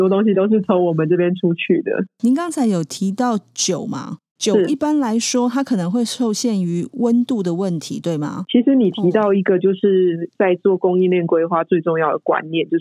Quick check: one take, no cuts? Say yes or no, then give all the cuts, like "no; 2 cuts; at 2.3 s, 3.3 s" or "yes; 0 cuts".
yes; 0 cuts